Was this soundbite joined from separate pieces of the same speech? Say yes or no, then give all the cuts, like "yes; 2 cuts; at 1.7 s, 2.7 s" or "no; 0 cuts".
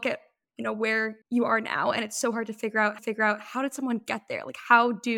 yes; 2 cuts; at 1.2 s, 3.0 s